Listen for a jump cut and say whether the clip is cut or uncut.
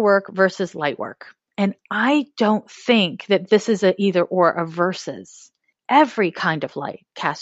uncut